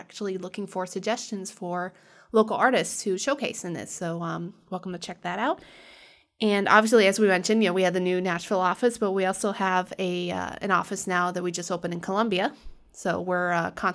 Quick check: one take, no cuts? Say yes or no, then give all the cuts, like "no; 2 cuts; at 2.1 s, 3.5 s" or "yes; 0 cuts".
yes; 0 cuts